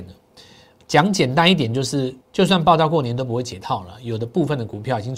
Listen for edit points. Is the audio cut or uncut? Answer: cut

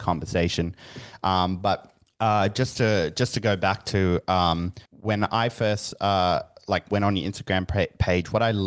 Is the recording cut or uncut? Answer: cut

